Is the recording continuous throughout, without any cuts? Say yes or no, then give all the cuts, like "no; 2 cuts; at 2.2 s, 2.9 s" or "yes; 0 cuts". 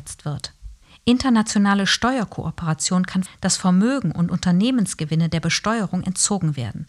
no; 1 cut; at 3.3 s